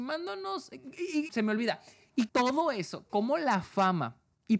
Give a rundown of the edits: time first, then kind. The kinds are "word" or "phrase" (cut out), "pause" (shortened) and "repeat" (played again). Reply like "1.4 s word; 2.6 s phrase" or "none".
1.3 s phrase; 2.3 s word